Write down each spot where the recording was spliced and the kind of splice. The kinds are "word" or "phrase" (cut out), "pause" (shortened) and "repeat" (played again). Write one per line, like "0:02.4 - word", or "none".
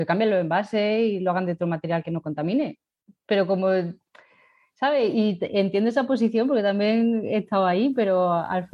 none